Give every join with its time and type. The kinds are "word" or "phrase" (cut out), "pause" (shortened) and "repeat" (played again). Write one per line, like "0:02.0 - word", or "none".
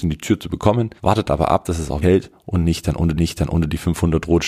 0:01.0 - pause
0:02.0 - word
0:03.2 - repeat

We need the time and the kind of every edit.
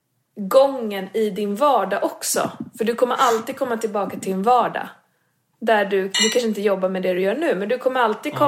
none

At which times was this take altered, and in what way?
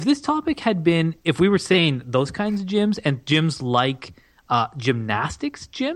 none

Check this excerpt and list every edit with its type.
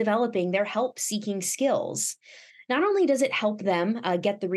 none

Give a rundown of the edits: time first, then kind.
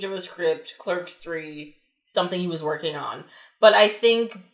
none

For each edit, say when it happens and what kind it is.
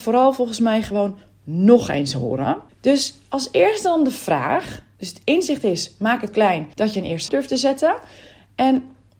0:02.7 - pause
0:06.3 - word
0:06.7 - pause
0:07.3 - word

